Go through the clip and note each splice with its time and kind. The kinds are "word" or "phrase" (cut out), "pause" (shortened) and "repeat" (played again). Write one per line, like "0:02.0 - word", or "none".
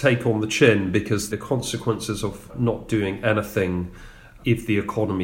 none

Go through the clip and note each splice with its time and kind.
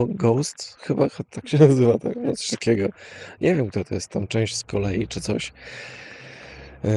none

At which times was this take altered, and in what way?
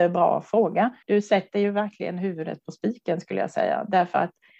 0:01.0 - pause

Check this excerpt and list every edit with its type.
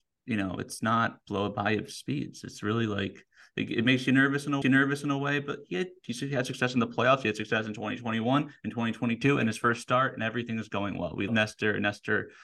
0:01.2 - pause
0:04.6 - repeat
0:11.3 - word

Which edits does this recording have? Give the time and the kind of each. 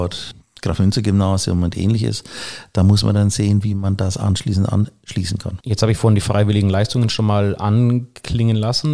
0:05.6 - pause

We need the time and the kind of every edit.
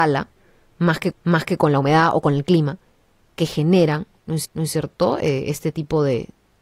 0:01.1 - repeat
0:04.4 - repeat

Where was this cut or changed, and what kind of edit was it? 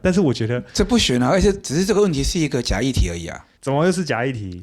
0:03.6 - pause

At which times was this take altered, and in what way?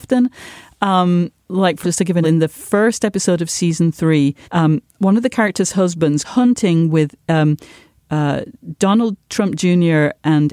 0:01.8 - word
0:02.2 - word
0:04.4 - pause
0:06.2 - word

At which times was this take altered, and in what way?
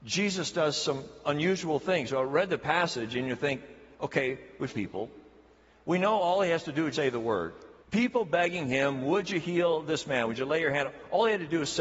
0:03.9 - pause
0:04.7 - phrase
0:06.9 - word
0:07.8 - pause

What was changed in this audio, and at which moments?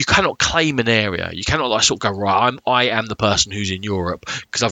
none

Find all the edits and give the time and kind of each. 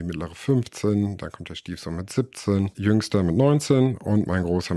0:02.7 - word

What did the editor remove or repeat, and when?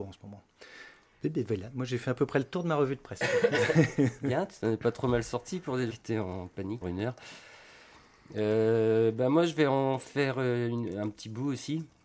0:05.9 - word
0:06.8 - phrase

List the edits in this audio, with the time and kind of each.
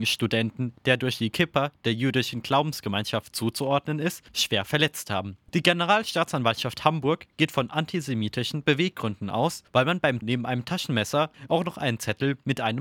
0:10.2 - word

